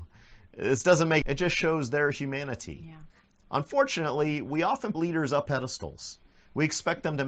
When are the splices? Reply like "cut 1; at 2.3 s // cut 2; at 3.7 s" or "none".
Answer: cut 1; at 1.2 s // cut 2; at 4.9 s // cut 3; at 5.5 s